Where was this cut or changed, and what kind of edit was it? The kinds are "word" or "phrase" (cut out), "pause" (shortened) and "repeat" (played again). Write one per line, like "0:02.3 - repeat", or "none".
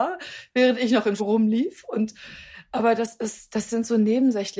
0:01.2 - word